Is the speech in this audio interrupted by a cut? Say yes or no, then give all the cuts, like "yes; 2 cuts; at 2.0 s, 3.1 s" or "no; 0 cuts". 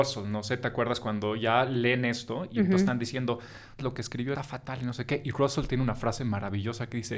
yes; 2 cuts; at 3.8 s, 4.3 s